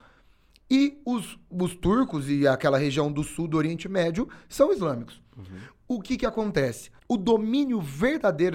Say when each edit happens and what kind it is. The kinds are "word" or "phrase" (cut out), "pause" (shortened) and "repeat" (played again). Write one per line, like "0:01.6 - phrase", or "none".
0:07.0 - pause